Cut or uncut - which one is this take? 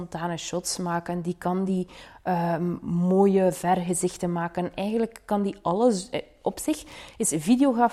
uncut